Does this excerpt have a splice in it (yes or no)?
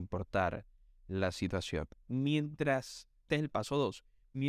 yes